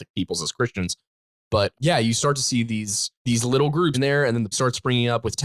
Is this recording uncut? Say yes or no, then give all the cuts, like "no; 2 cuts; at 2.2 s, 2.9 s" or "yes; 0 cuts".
no; 4 cuts; at 1.7 s, 3.2 s, 3.9 s, 4.5 s